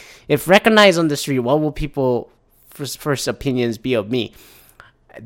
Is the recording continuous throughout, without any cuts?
yes; 0 cuts

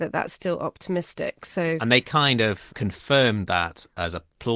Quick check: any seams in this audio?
no; 0 cuts

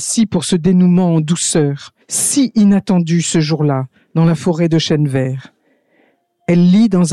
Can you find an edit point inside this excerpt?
yes; 1 cut; at 2.0 s

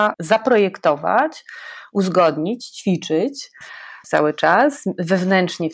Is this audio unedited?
no; 1 cut; at 4.0 s

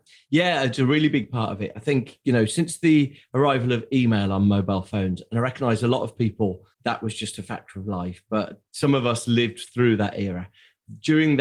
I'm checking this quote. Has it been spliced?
yes; 1 cut; at 6.7 s

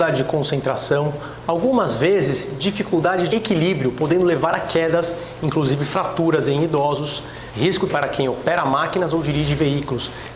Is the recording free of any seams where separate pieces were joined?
no; 2 cuts; at 3.3 s, 7.9 s

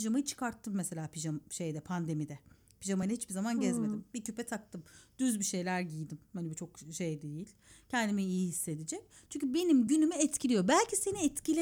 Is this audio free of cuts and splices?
yes; 0 cuts

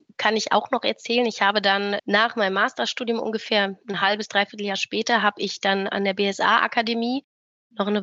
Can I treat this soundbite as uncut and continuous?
yes; 0 cuts

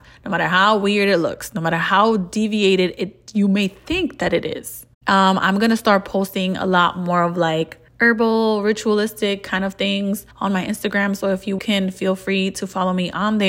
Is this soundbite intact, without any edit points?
no; 3 cuts; at 7.9 s, 10.3 s, 11.6 s

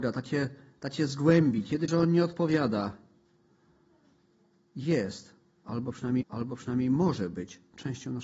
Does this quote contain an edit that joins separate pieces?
yes; 2 cuts; at 1.9 s, 6.2 s

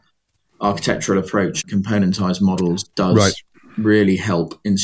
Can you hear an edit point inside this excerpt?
yes; 2 cuts; at 1.6 s, 2.9 s

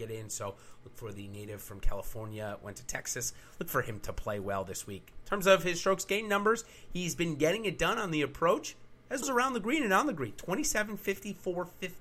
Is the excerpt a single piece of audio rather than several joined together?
no; 1 cut; at 9.2 s

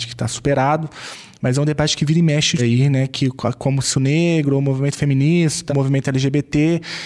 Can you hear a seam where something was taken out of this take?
yes; 3 cuts; at 2.6 s, 3.9 s, 5.7 s

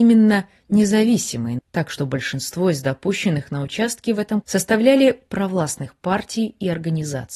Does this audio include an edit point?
yes; 3 cuts; at 1.6 s, 4.4 s, 5.3 s

